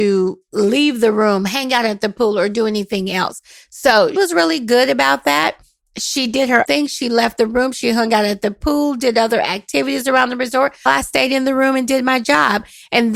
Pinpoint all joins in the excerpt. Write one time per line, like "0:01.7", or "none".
0:04.2
0:06.6
0:10.9